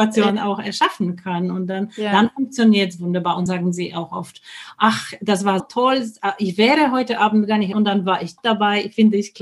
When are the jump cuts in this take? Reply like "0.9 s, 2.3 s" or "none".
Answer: 3.5 s, 5.6 s, 7.7 s, 8.4 s